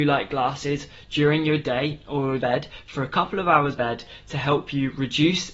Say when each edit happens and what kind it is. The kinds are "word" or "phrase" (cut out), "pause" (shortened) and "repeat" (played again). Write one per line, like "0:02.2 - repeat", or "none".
0:02.4 - phrase
0:03.8 - word